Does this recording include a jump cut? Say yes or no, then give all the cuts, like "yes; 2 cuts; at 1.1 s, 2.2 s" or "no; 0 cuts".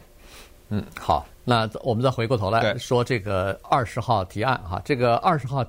yes; 1 cut; at 1.3 s